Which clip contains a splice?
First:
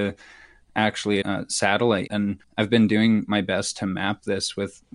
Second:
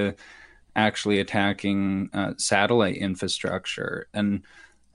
first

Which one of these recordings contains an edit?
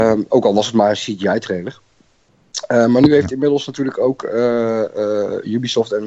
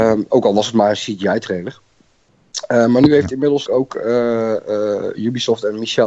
second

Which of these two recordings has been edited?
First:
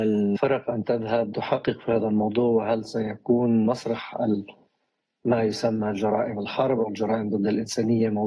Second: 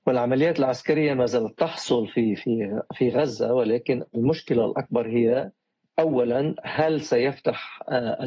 first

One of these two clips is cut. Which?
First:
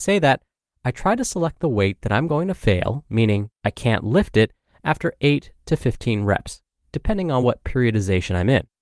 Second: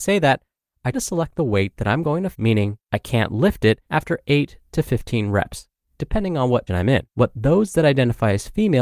second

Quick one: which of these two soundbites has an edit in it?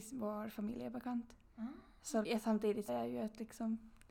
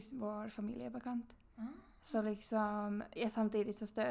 first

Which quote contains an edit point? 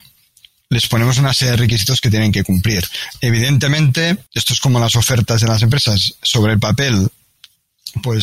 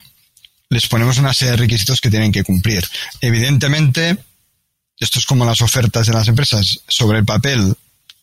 first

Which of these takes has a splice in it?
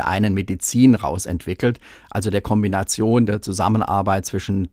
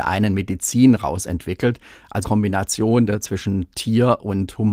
second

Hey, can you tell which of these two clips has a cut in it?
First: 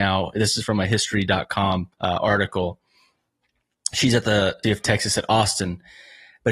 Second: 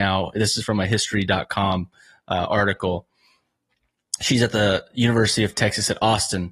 first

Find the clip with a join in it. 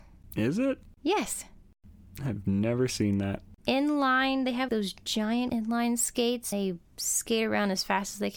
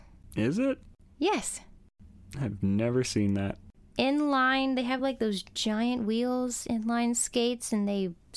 first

